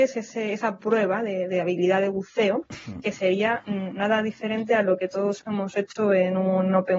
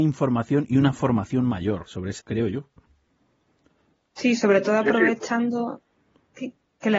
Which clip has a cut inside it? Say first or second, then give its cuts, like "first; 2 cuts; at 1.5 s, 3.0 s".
second; 2 cuts; at 1.9 s, 2.2 s